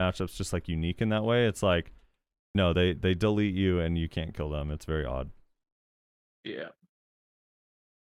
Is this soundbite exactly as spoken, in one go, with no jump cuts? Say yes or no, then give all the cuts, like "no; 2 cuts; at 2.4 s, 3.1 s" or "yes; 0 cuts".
yes; 0 cuts